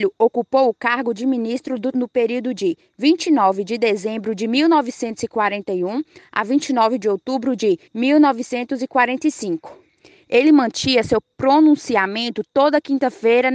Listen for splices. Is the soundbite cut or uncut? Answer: cut